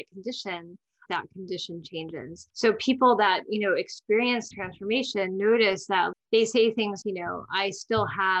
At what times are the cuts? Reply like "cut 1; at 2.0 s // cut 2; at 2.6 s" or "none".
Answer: cut 1; at 1.1 s // cut 2; at 2.5 s // cut 3; at 4.5 s // cut 4; at 6.1 s // cut 5; at 7.0 s

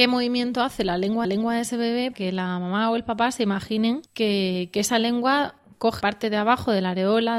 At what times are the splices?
cut 1; at 1.2 s // cut 2; at 2.1 s // cut 3; at 4.1 s // cut 4; at 6.0 s

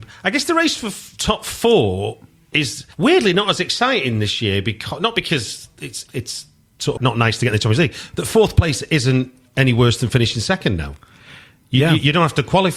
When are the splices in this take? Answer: cut 1; at 2.9 s // cut 2; at 6.1 s // cut 3; at 7.0 s

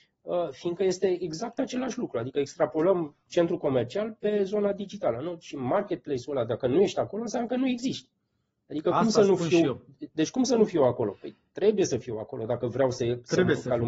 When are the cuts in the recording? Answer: none

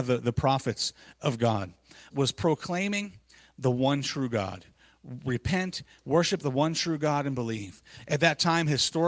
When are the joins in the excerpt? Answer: cut 1; at 2.1 s

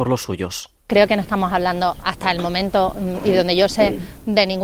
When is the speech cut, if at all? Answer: none

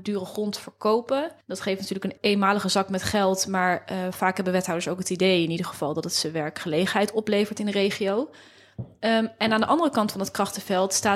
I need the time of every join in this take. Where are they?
cut 1; at 1.4 s // cut 2; at 2.2 s

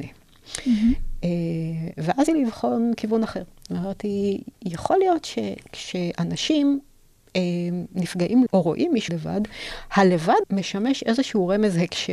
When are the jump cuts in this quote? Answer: cut 1; at 2.3 s // cut 2; at 8.5 s // cut 3; at 9.1 s // cut 4; at 10.4 s

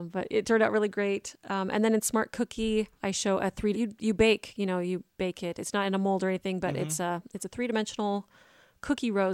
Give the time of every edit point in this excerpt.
cut 1; at 3.0 s // cut 2; at 3.7 s

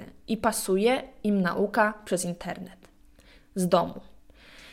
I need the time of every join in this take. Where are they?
none

